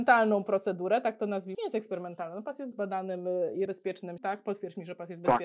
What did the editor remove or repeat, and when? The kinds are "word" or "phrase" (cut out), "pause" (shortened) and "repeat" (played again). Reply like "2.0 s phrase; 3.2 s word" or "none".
1.5 s word; 2.7 s word; 3.7 s word; 4.2 s word